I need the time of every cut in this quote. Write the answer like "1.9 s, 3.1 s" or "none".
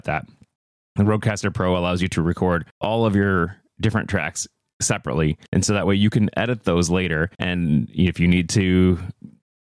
2.7 s, 5.5 s, 7.3 s